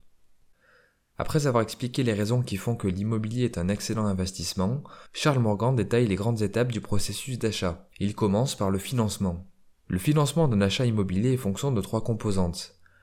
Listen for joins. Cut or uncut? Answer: cut